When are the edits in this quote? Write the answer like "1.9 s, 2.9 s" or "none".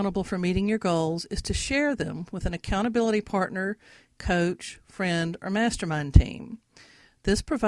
none

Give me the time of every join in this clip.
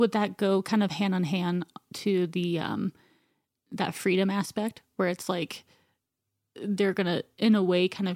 none

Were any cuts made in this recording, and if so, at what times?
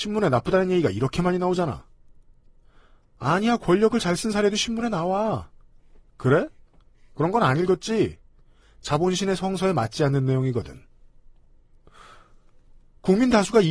none

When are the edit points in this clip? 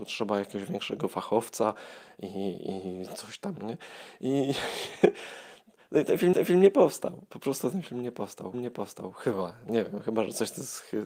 6.3 s, 8.5 s

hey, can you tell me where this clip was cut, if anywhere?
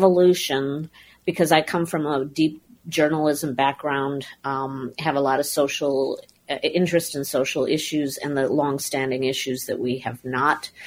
none

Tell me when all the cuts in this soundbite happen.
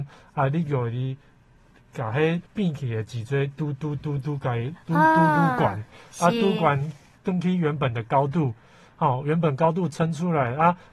2.5 s, 7.2 s

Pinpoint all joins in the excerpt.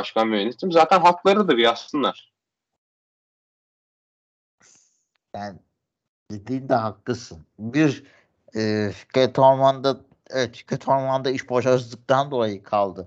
none

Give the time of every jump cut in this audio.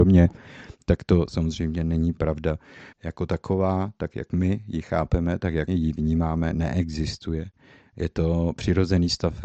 2.9 s, 5.7 s

